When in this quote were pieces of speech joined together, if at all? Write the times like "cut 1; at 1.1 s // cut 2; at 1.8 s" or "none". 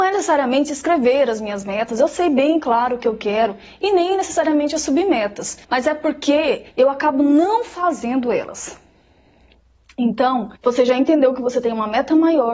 cut 1; at 5.6 s // cut 2; at 6.7 s // cut 3; at 10.6 s